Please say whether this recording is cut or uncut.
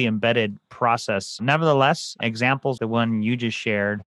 cut